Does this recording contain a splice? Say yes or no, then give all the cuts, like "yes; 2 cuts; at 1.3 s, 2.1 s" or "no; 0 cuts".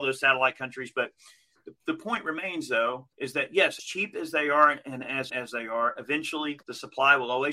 yes; 5 cuts; at 1.9 s, 3.1 s, 3.8 s, 5.3 s, 6.6 s